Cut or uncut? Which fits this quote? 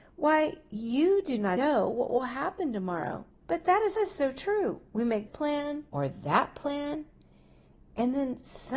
cut